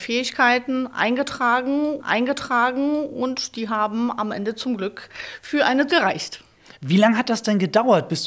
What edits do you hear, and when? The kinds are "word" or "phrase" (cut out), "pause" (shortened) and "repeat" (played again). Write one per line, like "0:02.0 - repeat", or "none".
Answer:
0:02.0 - repeat
0:05.9 - word